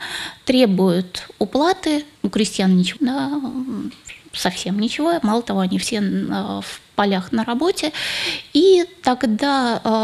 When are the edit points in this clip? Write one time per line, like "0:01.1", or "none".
0:02.2
0:03.0